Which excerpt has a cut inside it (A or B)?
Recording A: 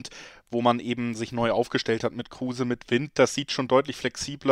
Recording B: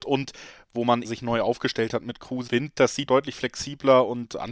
B